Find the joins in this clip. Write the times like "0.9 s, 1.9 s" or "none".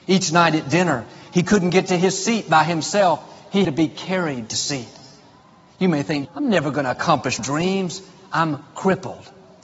3.6 s, 4.5 s, 6.2 s, 7.4 s

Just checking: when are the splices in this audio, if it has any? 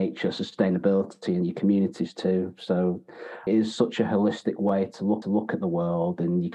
3.5 s, 5.2 s

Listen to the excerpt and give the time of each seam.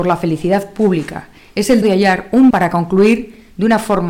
1.8 s, 2.5 s

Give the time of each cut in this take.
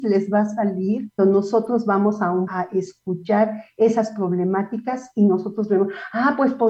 1.2 s, 2.5 s

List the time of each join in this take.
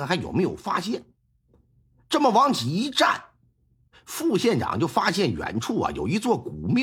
none

